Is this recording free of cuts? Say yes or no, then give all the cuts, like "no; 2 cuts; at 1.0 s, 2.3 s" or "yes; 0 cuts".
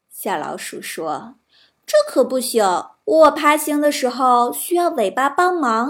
no; 2 cuts; at 1.4 s, 3.0 s